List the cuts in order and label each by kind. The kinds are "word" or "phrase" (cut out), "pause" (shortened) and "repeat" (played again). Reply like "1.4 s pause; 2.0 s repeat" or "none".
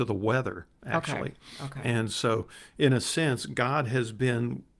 none